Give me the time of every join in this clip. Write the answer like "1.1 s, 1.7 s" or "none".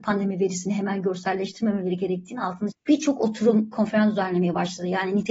2.7 s, 3.7 s